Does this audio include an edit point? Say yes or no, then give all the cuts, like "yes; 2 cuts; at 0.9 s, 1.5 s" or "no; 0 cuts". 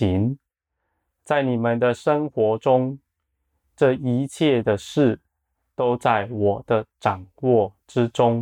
no; 0 cuts